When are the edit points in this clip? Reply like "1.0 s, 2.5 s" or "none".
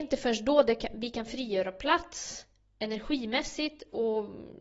none